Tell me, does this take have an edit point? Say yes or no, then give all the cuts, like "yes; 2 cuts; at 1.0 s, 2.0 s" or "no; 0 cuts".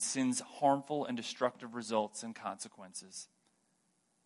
no; 0 cuts